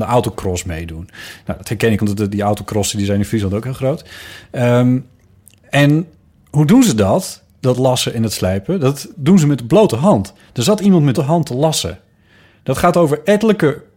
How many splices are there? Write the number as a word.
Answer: three